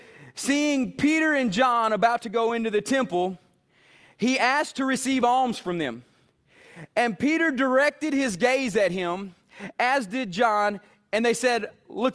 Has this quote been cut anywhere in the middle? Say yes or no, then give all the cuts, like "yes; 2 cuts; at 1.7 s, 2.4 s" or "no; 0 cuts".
no; 0 cuts